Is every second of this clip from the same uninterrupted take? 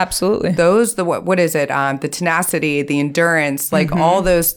yes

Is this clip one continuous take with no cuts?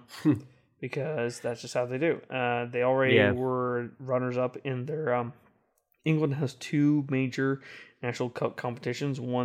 yes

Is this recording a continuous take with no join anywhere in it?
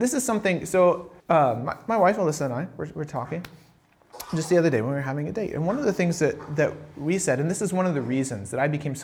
no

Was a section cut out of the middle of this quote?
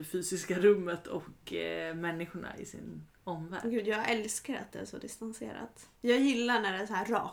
yes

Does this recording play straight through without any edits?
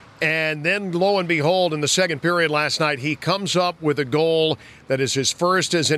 yes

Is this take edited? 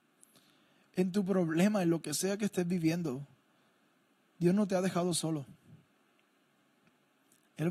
no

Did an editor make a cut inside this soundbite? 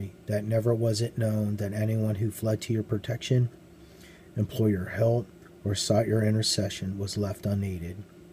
no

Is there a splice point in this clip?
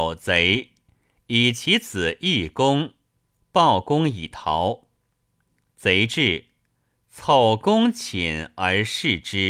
no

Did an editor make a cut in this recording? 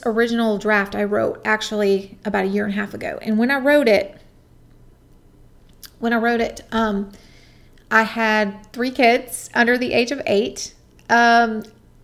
no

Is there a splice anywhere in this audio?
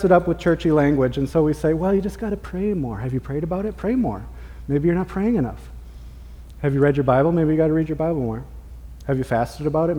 no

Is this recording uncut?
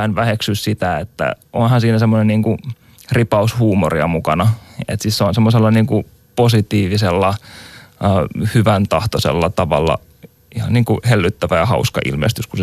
yes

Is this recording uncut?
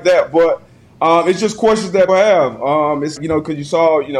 no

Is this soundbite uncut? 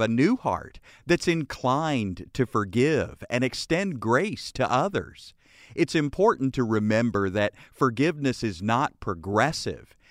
yes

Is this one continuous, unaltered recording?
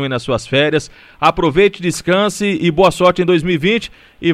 yes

